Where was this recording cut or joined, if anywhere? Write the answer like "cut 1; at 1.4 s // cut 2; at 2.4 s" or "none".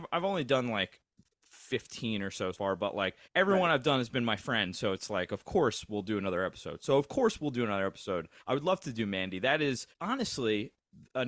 cut 1; at 2.5 s // cut 2; at 3.2 s // cut 3; at 8.4 s // cut 4; at 9.9 s